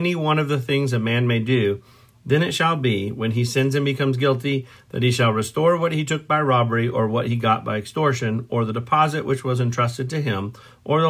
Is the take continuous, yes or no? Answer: yes